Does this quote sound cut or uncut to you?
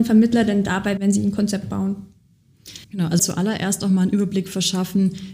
cut